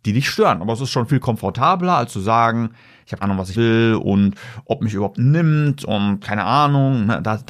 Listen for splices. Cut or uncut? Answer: cut